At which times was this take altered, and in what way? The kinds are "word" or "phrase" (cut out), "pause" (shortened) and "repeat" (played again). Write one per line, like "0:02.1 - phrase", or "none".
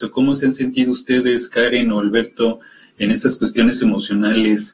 none